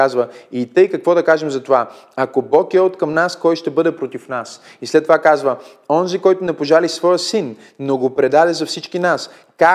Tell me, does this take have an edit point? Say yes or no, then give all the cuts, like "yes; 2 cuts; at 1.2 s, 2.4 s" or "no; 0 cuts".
no; 0 cuts